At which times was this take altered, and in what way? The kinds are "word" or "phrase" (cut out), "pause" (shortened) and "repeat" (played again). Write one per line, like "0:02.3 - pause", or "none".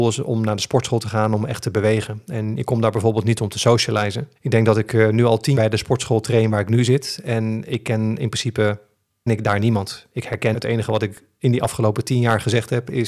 0:04.4 - pause
0:05.6 - word
0:09.3 - word
0:10.5 - phrase